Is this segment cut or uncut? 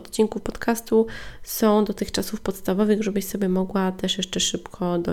uncut